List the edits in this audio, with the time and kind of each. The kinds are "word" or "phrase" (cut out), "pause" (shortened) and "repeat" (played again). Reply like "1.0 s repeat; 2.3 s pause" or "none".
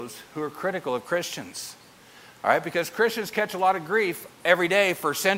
none